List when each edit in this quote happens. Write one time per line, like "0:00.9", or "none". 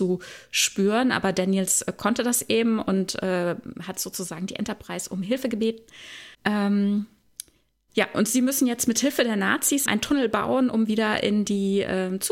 0:06.3
0:09.9